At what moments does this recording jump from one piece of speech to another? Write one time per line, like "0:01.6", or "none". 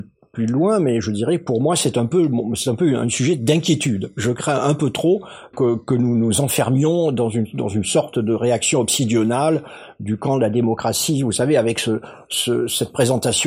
0:05.5